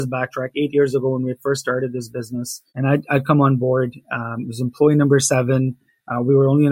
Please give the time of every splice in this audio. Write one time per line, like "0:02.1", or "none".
0:02.7